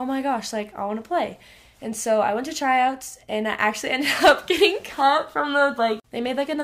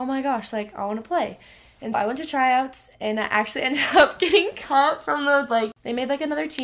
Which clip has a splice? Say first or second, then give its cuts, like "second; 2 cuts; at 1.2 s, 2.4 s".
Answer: second; 1 cut; at 1.9 s